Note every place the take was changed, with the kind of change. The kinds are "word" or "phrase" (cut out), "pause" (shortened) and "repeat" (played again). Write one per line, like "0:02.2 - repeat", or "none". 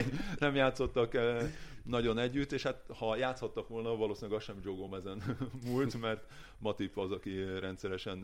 none